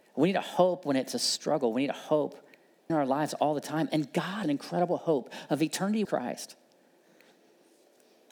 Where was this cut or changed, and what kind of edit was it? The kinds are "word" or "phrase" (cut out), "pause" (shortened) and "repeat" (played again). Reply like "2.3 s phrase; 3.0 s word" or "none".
2.9 s word; 4.4 s phrase; 6.0 s phrase